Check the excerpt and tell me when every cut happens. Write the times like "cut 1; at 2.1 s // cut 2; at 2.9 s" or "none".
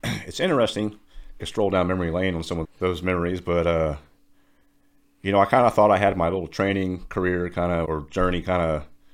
cut 1; at 1.4 s // cut 2; at 2.6 s // cut 3; at 7.8 s